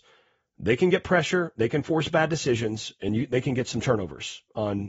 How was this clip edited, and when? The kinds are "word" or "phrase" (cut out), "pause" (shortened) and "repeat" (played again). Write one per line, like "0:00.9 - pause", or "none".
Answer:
none

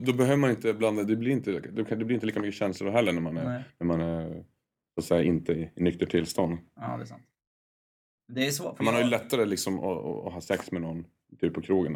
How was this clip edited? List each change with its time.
none

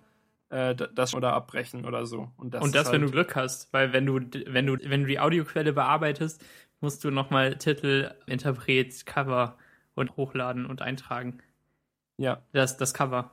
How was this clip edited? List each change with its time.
0:01.1 - word
0:04.8 - word
0:08.3 - word
0:10.1 - word

